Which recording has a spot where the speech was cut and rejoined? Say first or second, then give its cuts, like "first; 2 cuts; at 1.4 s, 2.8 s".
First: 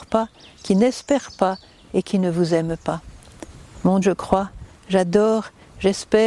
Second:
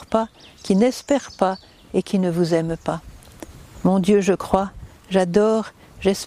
first; 1 cut; at 4.0 s